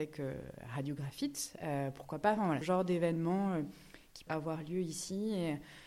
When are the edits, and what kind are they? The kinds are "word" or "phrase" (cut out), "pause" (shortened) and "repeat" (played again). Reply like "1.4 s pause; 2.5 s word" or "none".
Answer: 2.6 s word; 4.3 s word

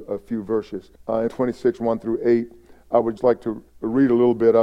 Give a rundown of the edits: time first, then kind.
1.0 s pause; 1.3 s word; 3.2 s word; 3.7 s pause

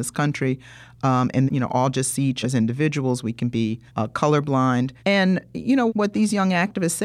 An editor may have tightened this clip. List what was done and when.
1.5 s phrase; 2.4 s word; 3.9 s pause; 5.0 s pause; 5.9 s word

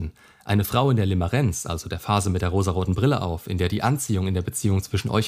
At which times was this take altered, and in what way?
none

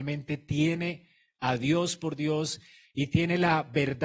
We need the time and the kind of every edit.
none

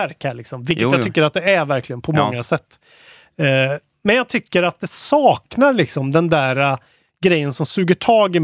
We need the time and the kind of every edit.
none

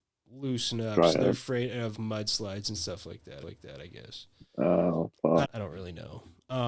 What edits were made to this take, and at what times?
1.9 s word; 3.4 s repeat; 5.4 s word

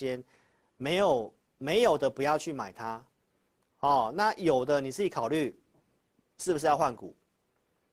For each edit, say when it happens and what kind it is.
none

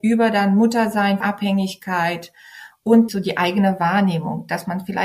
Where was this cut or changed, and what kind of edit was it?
1.2 s word; 3.1 s word

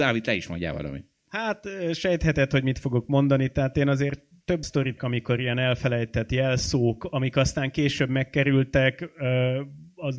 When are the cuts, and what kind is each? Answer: 4.6 s word; 5.0 s word

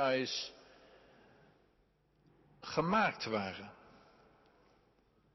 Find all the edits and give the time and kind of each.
none

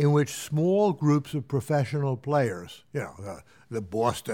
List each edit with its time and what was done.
none

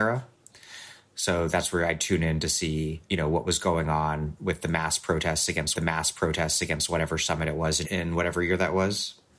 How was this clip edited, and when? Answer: 3.0 s pause; 5.7 s repeat; 7.8 s word

